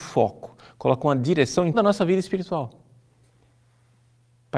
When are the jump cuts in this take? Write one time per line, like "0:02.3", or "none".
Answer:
0:01.7